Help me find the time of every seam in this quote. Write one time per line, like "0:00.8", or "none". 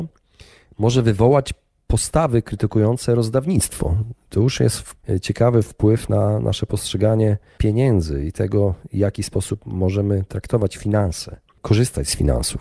none